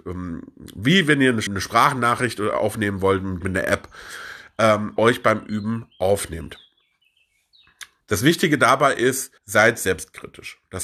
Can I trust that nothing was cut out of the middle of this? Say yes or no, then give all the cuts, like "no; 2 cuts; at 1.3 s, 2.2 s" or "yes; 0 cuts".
no; 5 cuts; at 1.5 s, 3.4 s, 5.0 s, 8.0 s, 9.4 s